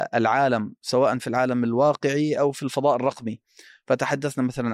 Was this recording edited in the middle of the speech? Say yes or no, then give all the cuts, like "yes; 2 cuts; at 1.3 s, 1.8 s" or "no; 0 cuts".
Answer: no; 0 cuts